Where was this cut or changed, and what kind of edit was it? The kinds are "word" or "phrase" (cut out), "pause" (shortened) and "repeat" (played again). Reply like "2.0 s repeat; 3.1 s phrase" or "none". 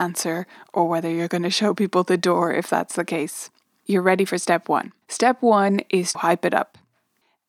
5.0 s pause; 6.1 s word